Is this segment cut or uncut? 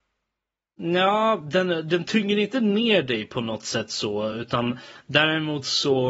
uncut